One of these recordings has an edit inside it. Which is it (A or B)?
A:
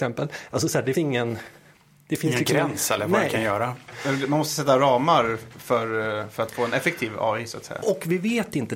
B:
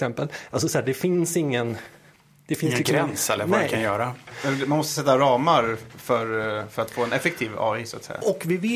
A